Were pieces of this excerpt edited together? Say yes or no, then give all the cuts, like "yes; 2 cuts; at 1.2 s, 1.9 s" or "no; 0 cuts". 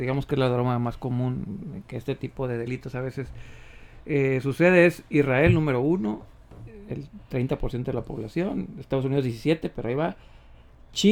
no; 0 cuts